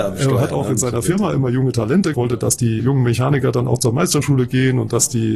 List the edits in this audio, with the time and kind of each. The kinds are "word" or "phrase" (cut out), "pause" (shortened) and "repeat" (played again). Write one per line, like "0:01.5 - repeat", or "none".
0:02.1 - word
0:02.8 - word